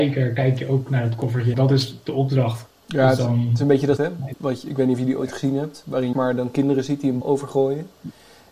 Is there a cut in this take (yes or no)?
yes